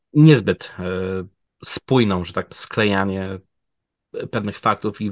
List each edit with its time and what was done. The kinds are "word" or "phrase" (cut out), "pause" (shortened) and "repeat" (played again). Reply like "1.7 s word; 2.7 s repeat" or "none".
2.5 s word